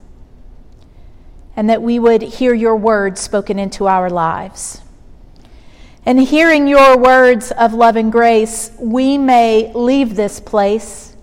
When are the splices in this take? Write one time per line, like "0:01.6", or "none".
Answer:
none